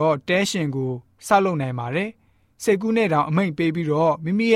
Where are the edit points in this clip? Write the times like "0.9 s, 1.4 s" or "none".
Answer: none

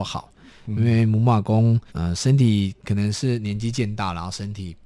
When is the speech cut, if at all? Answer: 1.9 s

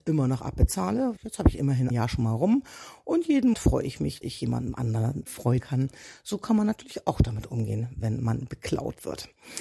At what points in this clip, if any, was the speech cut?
1.2 s, 1.9 s, 3.5 s, 4.2 s, 5.3 s, 5.6 s

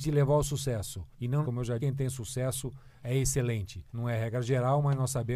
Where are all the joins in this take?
1.1 s, 1.4 s, 1.8 s, 3.0 s, 3.9 s

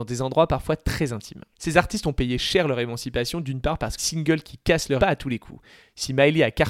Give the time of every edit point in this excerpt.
1.5 s, 4.0 s, 5.0 s

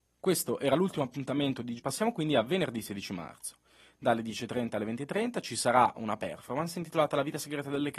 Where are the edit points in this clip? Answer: 1.8 s

